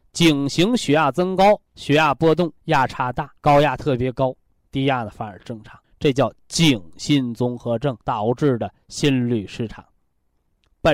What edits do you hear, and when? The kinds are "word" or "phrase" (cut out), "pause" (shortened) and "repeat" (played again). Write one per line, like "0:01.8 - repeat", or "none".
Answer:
0:01.7 - pause
0:02.6 - pause
0:03.4 - pause
0:04.6 - word
0:05.8 - pause
0:08.0 - pause